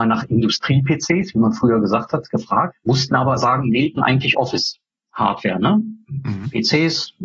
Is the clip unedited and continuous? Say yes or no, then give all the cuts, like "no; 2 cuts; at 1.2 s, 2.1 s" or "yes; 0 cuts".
no; 2 cuts; at 3.4 s, 4.0 s